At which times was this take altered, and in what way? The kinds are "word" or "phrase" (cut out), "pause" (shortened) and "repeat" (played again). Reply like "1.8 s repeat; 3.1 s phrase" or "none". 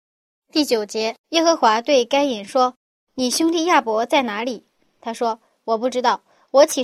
1.2 s pause